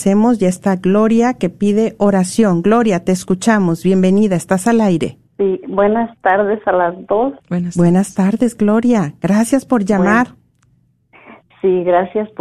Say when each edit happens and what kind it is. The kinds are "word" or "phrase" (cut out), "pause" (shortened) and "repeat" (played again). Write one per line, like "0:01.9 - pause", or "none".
0:05.3 - pause